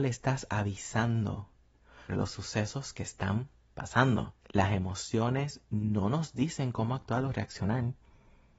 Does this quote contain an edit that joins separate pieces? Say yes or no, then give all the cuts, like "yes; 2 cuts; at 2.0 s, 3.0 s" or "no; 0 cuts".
yes; 2 cuts; at 2.1 s, 4.4 s